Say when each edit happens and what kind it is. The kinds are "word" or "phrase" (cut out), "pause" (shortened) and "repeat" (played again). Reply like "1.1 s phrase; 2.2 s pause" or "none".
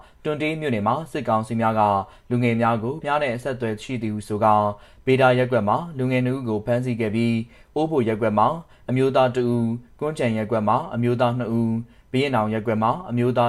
3.0 s word

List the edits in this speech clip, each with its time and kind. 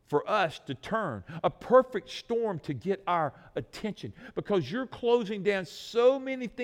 none

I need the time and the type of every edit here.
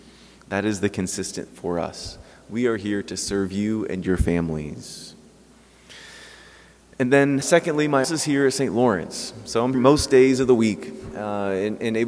1.5 s word; 7.4 s word; 8.0 s word; 9.7 s word

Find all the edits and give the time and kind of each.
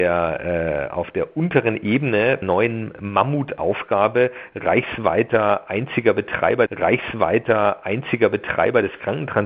2.4 s phrase; 6.7 s repeat

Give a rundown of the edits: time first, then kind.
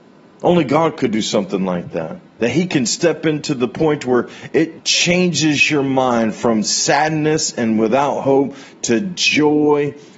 2.3 s pause; 4.8 s word

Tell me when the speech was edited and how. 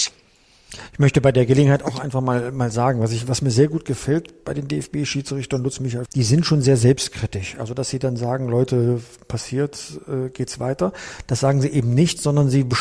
6.1 s phrase

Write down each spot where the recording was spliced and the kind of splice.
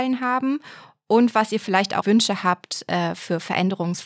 2.0 s word

